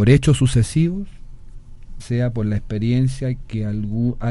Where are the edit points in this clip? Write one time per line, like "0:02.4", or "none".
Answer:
0:02.0